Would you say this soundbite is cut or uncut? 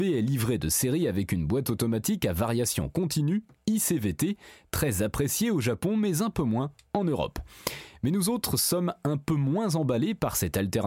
uncut